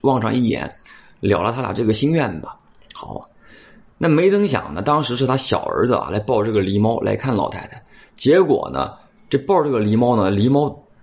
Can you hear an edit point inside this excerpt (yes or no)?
no